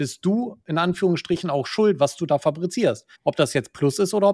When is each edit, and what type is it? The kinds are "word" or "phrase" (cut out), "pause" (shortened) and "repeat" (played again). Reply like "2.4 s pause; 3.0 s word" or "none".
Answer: 3.1 s pause